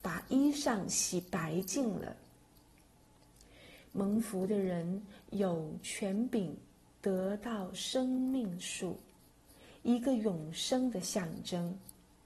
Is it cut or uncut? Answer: uncut